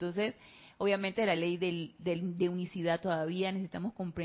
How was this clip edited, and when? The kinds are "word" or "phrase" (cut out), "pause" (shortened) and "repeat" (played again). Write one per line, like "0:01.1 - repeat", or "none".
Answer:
none